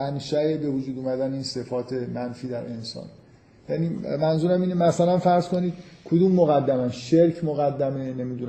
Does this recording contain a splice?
no; 0 cuts

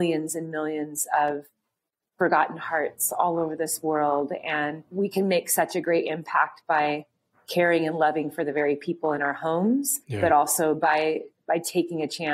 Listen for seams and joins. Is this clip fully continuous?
yes; 0 cuts

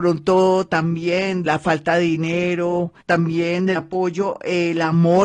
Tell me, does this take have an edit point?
yes; 3 cuts; at 1.5 s, 3.0 s, 3.8 s

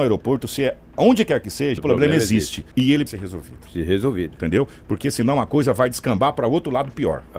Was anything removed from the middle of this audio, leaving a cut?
yes; 3 cuts; at 1.8 s, 2.7 s, 3.1 s

